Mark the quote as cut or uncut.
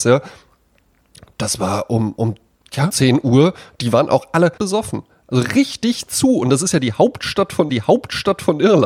cut